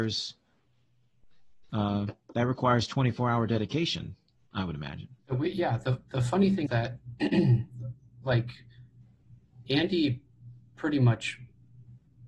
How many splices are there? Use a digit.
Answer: 2